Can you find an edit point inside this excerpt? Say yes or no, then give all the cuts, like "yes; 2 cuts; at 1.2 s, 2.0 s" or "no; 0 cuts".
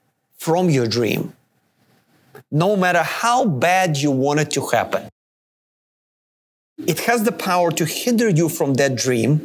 no; 0 cuts